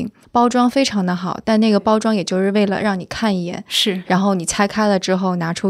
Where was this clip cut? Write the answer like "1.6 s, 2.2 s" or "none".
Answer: none

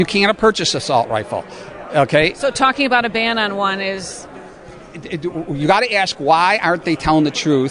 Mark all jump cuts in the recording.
none

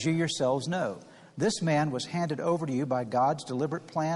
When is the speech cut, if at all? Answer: none

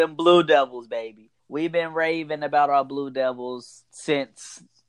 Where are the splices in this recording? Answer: 1.4 s, 3.9 s

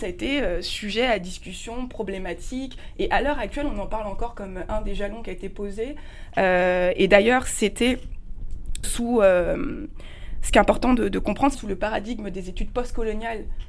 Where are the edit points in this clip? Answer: 8.8 s, 11.5 s

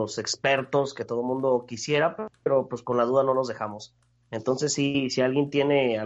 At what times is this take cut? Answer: none

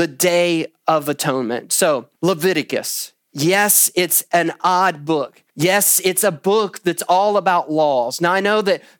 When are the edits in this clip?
2.1 s, 5.5 s

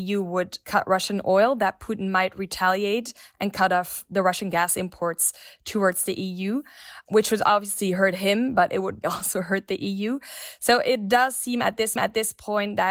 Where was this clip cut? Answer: 9.0 s, 12.0 s

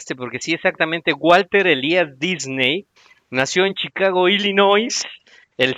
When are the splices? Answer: none

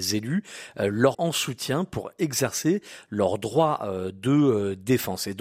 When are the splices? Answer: 1.1 s

